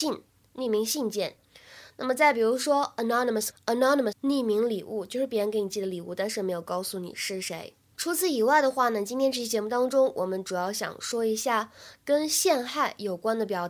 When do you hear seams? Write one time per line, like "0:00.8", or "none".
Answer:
0:03.5
0:04.1
0:07.9